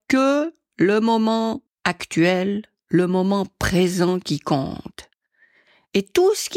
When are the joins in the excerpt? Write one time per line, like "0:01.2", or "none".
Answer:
0:01.7